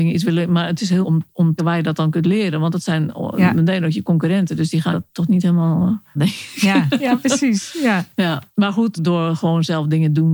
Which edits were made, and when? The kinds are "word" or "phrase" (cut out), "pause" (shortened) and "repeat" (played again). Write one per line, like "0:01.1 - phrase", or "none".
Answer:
0:01.0 - word
0:01.6 - word
0:04.9 - word
0:06.2 - word
0:09.0 - word